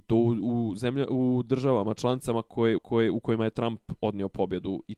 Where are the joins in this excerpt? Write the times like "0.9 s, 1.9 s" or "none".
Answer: 2.8 s

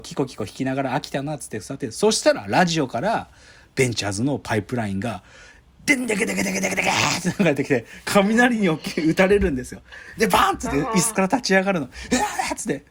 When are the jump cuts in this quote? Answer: none

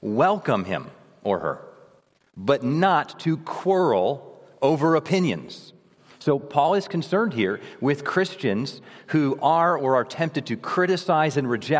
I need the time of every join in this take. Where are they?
none

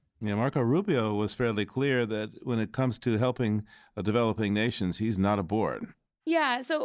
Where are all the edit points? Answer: none

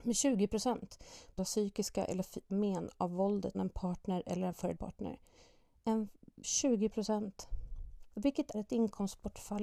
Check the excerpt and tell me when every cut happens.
1.4 s, 2.5 s, 3.5 s, 4.8 s, 6.4 s, 8.5 s

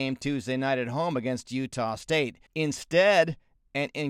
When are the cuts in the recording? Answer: 2.5 s

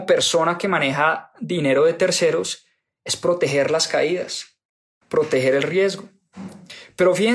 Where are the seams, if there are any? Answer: none

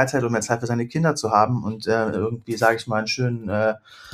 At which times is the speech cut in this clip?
2.1 s

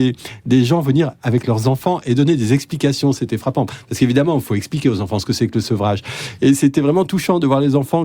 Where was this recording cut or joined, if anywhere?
none

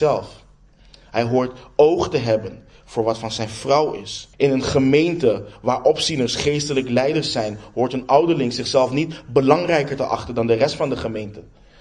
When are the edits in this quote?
4.3 s

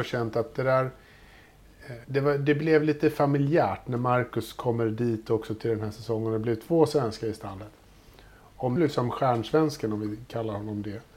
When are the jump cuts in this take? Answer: 2.0 s, 8.8 s

